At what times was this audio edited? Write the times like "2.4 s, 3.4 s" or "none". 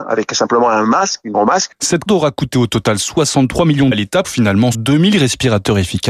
1.3 s, 2.1 s, 3.9 s, 4.2 s, 4.7 s